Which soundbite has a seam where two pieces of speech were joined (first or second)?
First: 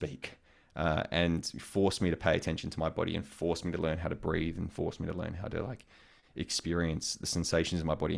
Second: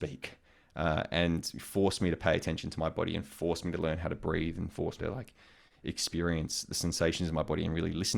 second